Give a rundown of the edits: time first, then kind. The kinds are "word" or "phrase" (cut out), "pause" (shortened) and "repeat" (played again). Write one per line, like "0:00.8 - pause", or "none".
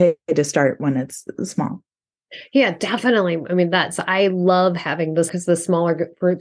0:05.3 - word

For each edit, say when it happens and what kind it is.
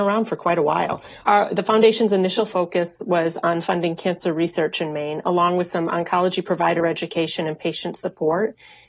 none

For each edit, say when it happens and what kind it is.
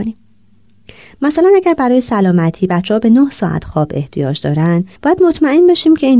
0:05.0 - pause

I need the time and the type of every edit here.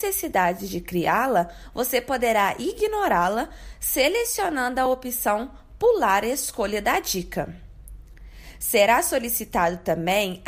none

